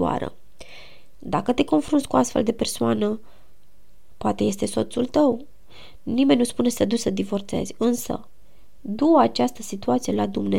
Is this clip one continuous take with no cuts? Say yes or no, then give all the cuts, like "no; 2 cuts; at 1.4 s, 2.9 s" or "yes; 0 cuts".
yes; 0 cuts